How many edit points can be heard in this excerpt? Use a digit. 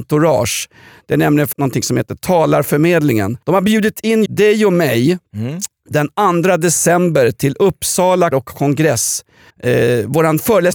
6